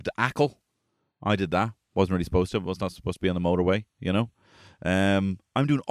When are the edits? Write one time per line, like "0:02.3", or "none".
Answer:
none